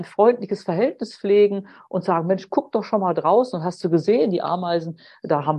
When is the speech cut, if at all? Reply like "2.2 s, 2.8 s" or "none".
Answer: none